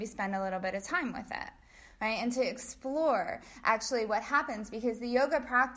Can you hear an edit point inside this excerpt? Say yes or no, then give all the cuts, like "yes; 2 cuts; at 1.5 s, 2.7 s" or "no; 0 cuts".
no; 0 cuts